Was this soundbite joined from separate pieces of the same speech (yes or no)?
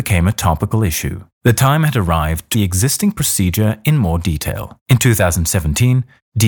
yes